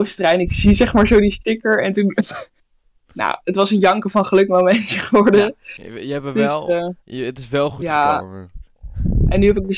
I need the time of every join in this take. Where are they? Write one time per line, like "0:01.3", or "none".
0:07.0